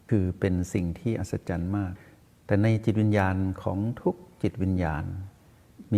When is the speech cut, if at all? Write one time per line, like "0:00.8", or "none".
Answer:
none